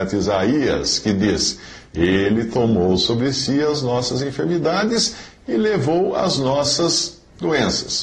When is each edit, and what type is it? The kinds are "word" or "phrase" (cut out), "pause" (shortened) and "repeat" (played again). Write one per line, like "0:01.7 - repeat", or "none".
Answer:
none